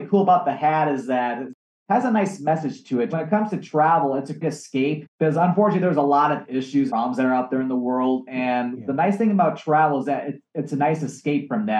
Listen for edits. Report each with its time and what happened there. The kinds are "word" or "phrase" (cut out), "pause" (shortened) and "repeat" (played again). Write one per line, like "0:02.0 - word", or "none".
0:03.1 - phrase
0:04.4 - phrase
0:05.1 - pause
0:06.9 - word